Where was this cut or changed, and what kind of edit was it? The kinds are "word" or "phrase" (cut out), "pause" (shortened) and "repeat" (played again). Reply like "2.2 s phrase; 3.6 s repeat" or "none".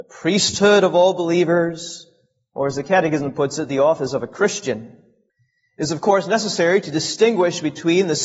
none